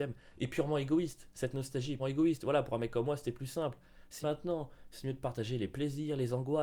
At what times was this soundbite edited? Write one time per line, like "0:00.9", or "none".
0:02.0
0:04.2